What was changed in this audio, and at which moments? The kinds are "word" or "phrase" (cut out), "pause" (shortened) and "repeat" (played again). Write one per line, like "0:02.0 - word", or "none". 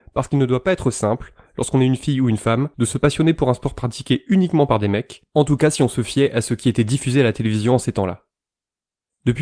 0:02.7 - pause